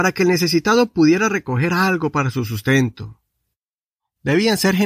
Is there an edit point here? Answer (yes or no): no